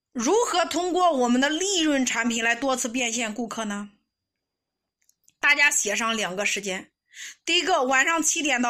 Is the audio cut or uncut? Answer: uncut